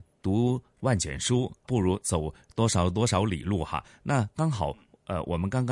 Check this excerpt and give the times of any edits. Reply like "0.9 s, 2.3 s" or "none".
1.6 s